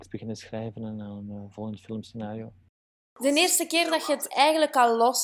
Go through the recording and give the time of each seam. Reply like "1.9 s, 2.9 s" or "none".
none